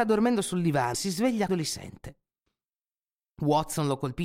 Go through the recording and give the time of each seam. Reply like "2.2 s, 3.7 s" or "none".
0.9 s, 1.5 s